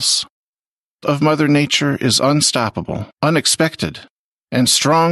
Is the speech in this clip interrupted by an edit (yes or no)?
yes